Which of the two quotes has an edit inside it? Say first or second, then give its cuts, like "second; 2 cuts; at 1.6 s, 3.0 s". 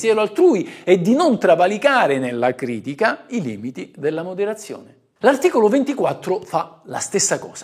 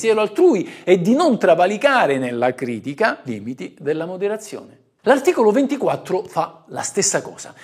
second; 1 cut; at 3.3 s